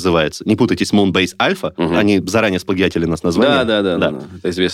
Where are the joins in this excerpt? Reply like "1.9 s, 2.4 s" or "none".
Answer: none